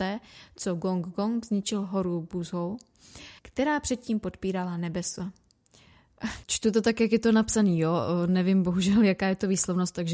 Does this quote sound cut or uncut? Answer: cut